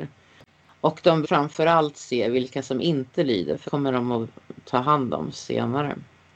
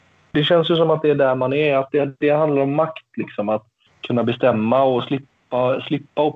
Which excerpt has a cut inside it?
first; 2 cuts; at 1.2 s, 3.7 s

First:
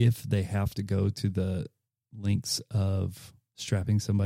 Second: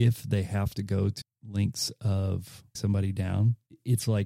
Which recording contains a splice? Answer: second; 2 cuts; at 1.2 s, 2.8 s

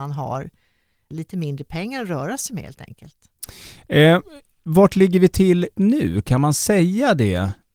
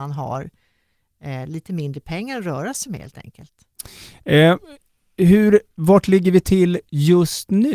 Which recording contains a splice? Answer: first; 3 cuts; at 1.1 s, 4.6 s, 5.7 s

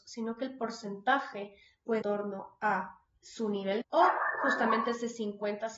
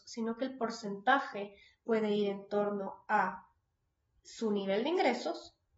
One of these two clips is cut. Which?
first; 3 cuts; at 2.0 s, 3.1 s, 3.8 s

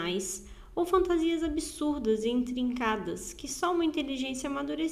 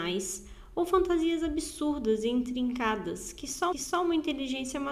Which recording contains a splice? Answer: second; 1 cut; at 3.7 s

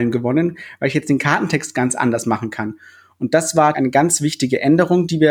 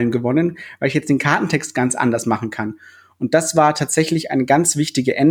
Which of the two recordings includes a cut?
first; 1 cut; at 3.7 s

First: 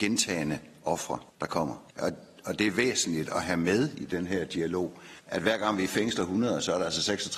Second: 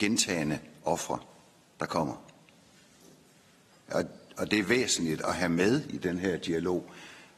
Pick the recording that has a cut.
first; 3 cuts; at 1.3 s, 1.9 s, 5.2 s

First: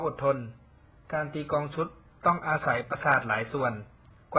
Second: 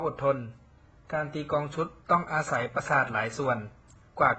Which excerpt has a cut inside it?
second; 1 cut; at 2.0 s

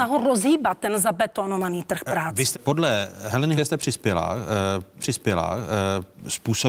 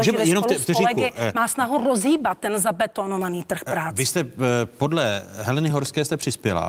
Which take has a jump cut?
first; 3 cuts; at 2.5 s, 3.6 s, 5.0 s

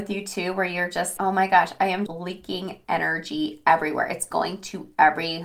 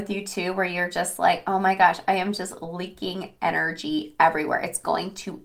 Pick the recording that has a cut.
first; 2 cuts; at 1.2 s, 2.1 s

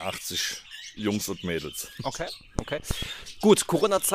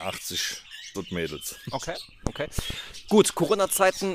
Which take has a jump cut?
second; 1 cut; at 0.9 s

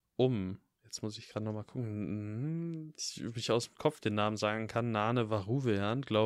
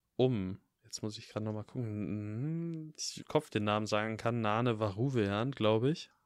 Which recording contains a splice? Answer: second; 1 cut; at 3.2 s

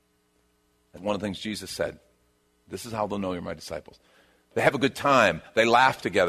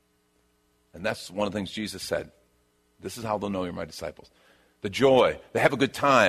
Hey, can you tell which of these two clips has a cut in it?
first; 2 cuts; at 1.0 s, 4.5 s

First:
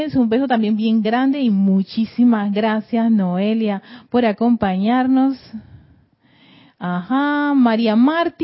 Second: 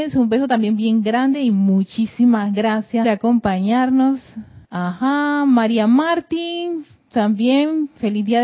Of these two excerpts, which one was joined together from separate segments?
second; 2 cuts; at 3.0 s, 4.6 s

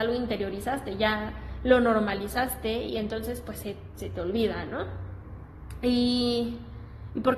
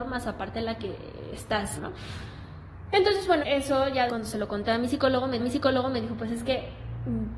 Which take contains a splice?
second; 4 cuts; at 1.8 s, 3.4 s, 4.1 s, 5.4 s

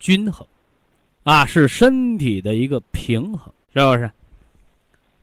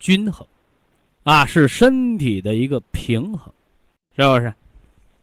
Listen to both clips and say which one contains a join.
first; 1 cut; at 3.6 s

